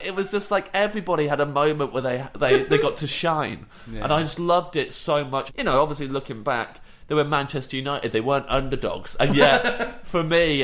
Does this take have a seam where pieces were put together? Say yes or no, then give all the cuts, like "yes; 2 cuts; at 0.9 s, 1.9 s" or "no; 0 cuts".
no; 0 cuts